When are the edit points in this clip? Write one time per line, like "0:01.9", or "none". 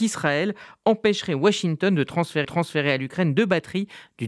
0:02.4